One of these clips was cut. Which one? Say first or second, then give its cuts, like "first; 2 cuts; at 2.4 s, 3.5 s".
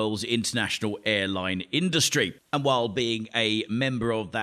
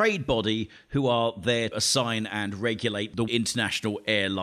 second; 2 cuts; at 1.7 s, 3.3 s